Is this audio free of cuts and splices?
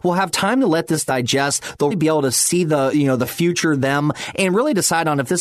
no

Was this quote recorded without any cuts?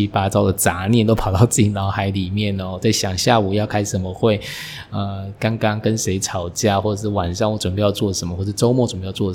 yes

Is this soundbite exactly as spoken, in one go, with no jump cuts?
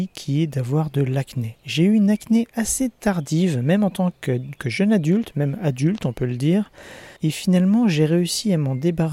no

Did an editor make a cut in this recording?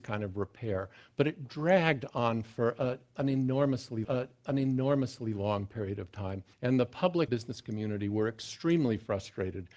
yes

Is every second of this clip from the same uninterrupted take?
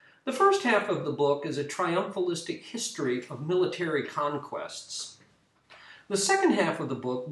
yes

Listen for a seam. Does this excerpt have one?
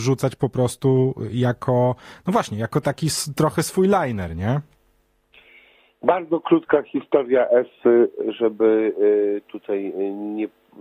no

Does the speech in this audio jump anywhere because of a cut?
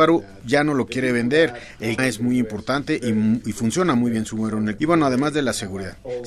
yes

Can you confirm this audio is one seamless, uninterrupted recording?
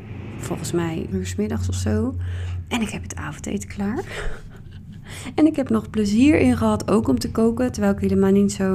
no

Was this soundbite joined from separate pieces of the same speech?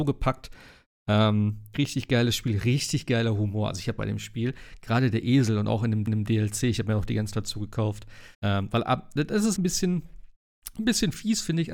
yes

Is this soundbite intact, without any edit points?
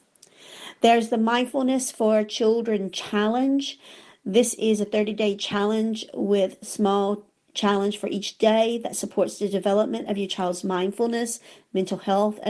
yes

